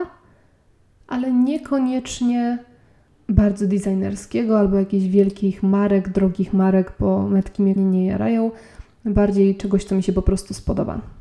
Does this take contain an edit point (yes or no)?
yes